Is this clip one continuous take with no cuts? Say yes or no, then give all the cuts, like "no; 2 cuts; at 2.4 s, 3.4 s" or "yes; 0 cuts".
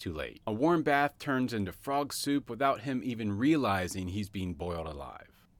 yes; 0 cuts